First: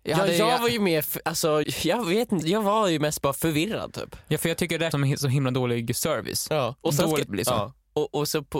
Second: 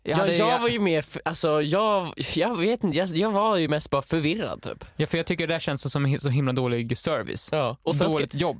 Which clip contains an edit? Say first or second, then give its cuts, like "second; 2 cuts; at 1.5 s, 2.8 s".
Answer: first; 4 cuts; at 1.6 s, 2.4 s, 4.9 s, 7.3 s